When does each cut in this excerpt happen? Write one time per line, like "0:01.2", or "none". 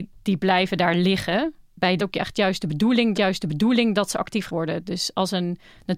0:02.0
0:03.1
0:04.5